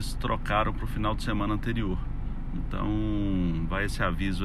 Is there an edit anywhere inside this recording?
no; 0 cuts

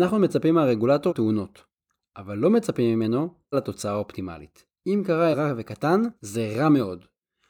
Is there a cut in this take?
yes; 5 cuts; at 1.1 s, 3.5 s, 4.8 s, 5.3 s, 6.2 s

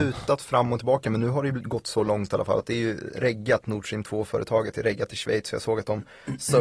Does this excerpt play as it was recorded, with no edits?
yes; 0 cuts

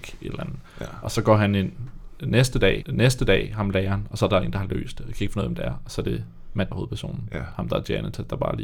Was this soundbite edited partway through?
yes; 2 cuts; at 2.8 s, 6.7 s

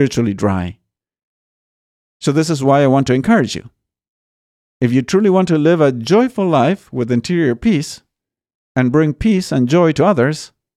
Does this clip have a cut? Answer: no; 0 cuts

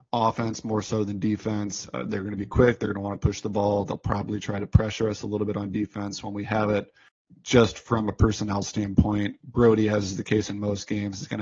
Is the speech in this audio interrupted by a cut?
no; 0 cuts

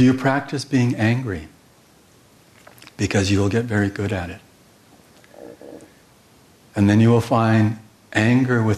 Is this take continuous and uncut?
yes; 0 cuts

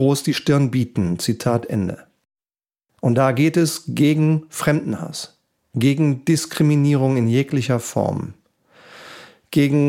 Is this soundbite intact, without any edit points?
yes; 0 cuts

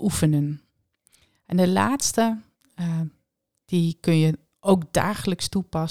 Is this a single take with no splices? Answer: yes; 0 cuts

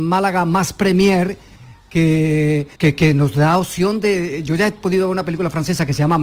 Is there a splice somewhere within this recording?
yes; 1 cut; at 2.7 s

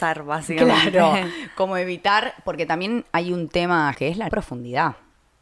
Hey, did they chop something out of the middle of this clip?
yes; 2 cuts; at 3.9 s, 4.3 s

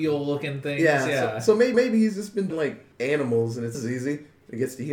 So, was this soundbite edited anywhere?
yes; 4 cuts; at 1.7 s, 2.5 s, 2.9 s, 3.7 s

